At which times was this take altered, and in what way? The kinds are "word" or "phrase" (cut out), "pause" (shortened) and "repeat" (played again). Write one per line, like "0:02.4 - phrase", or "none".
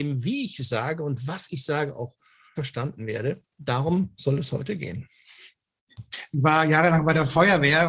0:02.6 - word